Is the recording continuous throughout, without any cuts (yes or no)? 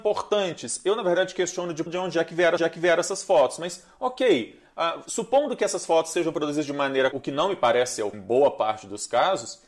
no